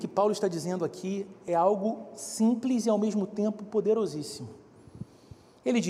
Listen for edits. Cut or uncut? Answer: uncut